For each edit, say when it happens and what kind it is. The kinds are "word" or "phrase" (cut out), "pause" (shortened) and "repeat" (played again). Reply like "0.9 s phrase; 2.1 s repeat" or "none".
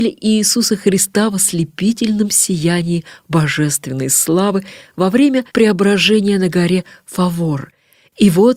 5.5 s pause